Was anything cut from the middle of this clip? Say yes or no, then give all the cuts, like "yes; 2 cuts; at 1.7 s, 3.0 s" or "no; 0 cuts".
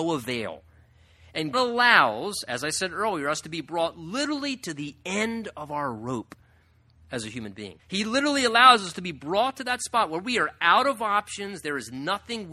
yes; 2 cuts; at 1.5 s, 7.8 s